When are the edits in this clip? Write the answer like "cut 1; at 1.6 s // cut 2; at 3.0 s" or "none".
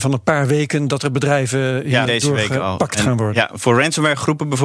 cut 1; at 2.1 s

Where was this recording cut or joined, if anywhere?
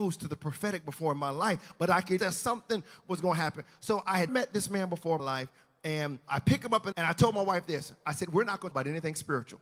cut 1; at 2.2 s // cut 2; at 4.3 s // cut 3; at 5.2 s // cut 4; at 6.3 s // cut 5; at 6.9 s // cut 6; at 8.7 s

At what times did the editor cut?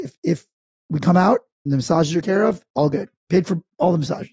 cut 1; at 1.7 s // cut 2; at 2.2 s // cut 3; at 3.2 s

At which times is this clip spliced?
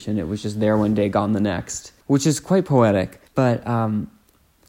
cut 1; at 2.0 s // cut 2; at 3.3 s

